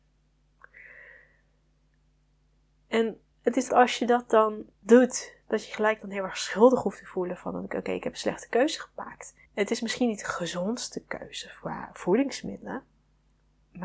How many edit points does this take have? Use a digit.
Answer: 4